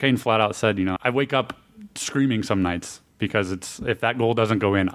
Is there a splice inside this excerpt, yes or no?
yes